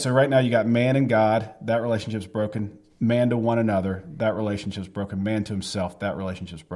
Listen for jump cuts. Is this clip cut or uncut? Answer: uncut